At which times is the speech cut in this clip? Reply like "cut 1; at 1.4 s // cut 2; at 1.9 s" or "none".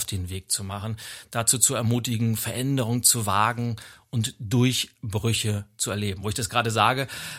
none